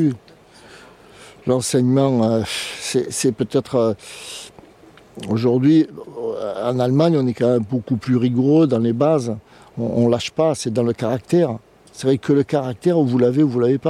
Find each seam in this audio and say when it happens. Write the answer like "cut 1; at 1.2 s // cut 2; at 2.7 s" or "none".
none